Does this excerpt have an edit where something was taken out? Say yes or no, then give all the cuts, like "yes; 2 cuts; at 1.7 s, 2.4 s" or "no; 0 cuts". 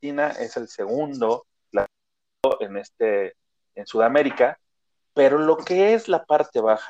no; 0 cuts